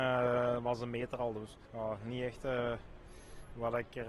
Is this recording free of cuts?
no; 1 cut; at 1.6 s

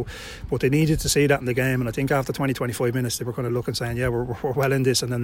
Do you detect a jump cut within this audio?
no; 0 cuts

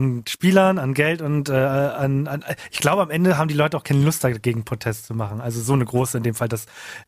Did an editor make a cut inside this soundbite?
no; 0 cuts

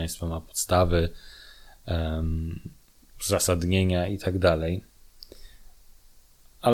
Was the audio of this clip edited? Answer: no; 0 cuts

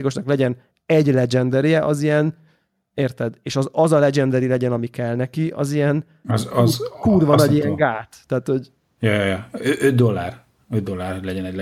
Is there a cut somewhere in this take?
no; 0 cuts

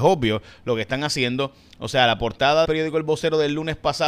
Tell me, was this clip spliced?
yes; 1 cut; at 2.6 s

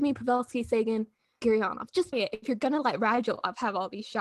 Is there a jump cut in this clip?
yes; 2 cuts; at 1.4 s, 2.1 s

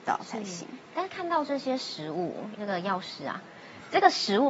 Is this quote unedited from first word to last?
no; 1 cut; at 2.6 s

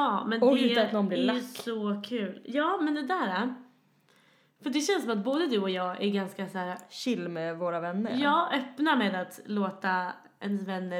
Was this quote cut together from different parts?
no; 0 cuts

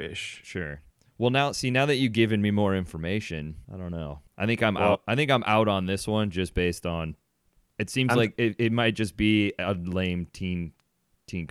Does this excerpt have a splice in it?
yes; 2 cuts; at 3.6 s, 4.3 s

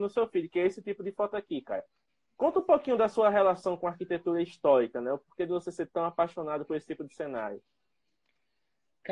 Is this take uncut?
yes; 0 cuts

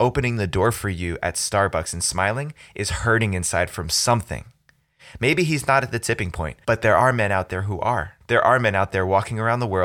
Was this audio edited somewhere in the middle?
yes; 1 cut; at 8.2 s

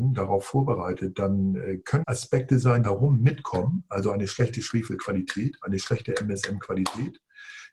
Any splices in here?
yes; 2 cuts; at 2.0 s, 2.8 s

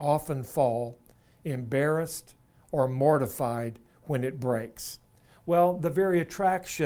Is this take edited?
no; 0 cuts

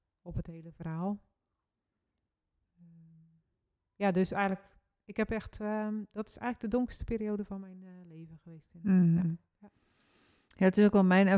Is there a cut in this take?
no; 0 cuts

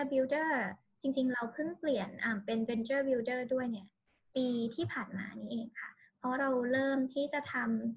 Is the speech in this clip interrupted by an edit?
no; 0 cuts

